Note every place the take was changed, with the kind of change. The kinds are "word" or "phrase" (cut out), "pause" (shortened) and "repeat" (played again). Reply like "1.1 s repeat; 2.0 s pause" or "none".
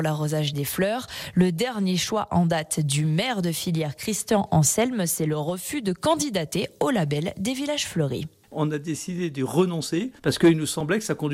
10.2 s pause